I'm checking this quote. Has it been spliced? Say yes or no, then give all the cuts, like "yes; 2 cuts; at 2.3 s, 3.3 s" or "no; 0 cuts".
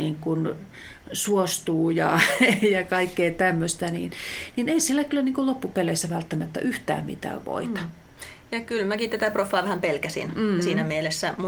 no; 0 cuts